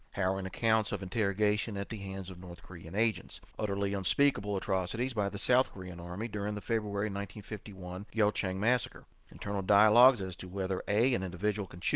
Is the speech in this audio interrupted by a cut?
yes; 1 cut; at 3.5 s

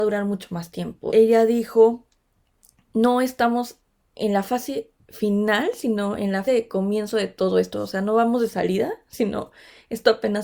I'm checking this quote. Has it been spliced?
yes; 2 cuts; at 1.1 s, 6.5 s

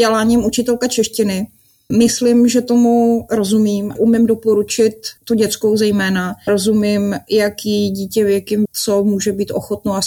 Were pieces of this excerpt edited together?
yes; 5 cuts; at 1.9 s, 4.0 s, 5.2 s, 6.5 s, 8.7 s

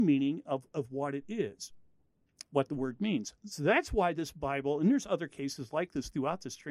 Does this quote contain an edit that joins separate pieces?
no; 0 cuts

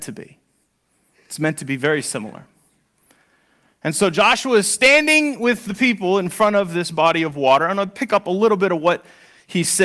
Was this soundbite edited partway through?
no; 0 cuts

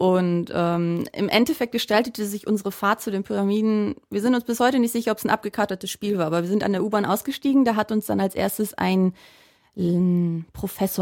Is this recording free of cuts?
yes; 0 cuts

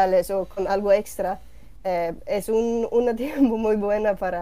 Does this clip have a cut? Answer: no; 0 cuts

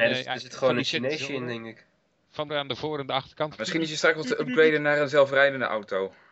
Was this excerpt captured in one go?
no; 1 cut; at 2.5 s

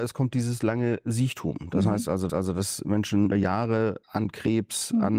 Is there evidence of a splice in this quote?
yes; 3 cuts; at 2.3 s, 3.3 s, 4.0 s

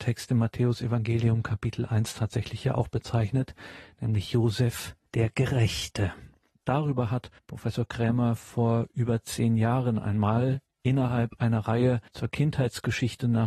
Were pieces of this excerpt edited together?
yes; 3 cuts; at 5.1 s, 7.4 s, 12.1 s

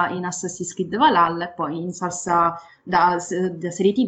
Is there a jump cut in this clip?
no; 0 cuts

